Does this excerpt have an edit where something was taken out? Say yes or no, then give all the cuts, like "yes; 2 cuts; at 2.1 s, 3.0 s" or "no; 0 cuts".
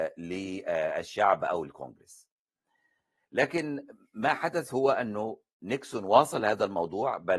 no; 0 cuts